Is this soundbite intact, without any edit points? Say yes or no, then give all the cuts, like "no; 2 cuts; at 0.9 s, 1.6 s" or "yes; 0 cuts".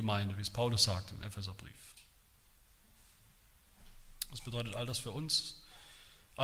yes; 0 cuts